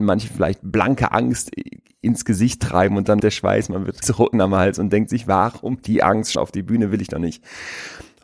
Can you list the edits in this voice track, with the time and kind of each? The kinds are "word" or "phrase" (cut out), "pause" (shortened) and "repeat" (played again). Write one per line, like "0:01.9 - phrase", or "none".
0:03.2 - word
0:04.0 - word
0:04.3 - word
0:05.8 - word
0:06.3 - word